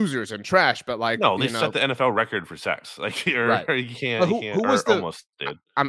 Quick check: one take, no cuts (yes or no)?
yes